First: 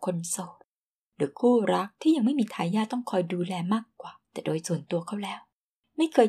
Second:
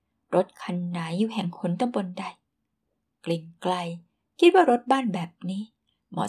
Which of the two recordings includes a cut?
first; 1 cut; at 4.2 s

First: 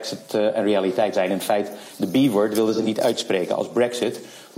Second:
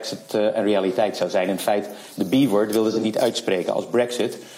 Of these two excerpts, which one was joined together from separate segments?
first; 1 cut; at 1.1 s

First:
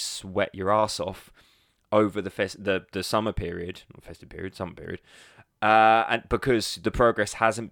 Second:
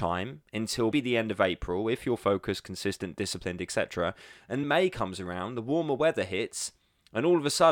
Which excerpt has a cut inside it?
second; 2 cuts; at 0.9 s, 4.6 s

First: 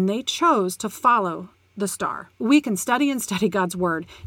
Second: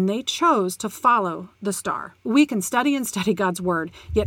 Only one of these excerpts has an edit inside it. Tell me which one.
second; 1 cut; at 1.6 s

